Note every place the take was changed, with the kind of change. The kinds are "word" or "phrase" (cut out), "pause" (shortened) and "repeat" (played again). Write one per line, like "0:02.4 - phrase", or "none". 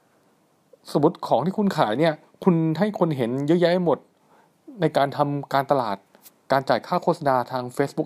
none